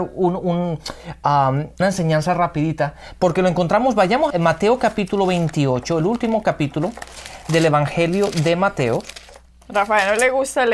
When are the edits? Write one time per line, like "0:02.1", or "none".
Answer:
0:01.8
0:04.3